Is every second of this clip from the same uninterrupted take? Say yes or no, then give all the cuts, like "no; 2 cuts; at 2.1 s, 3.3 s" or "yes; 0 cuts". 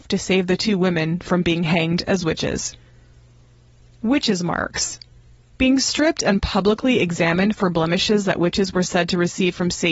yes; 0 cuts